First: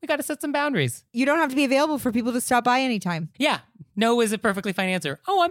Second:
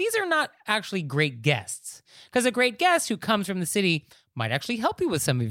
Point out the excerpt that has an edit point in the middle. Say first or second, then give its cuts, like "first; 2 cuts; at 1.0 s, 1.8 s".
first; 1 cut; at 3.3 s